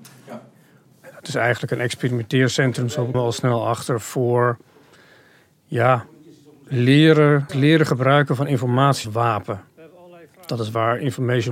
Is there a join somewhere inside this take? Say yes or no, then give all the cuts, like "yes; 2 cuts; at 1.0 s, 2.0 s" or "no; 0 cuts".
yes; 3 cuts; at 3.1 s, 7.5 s, 9.0 s